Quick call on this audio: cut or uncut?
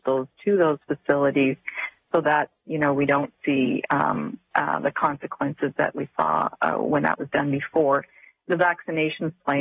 uncut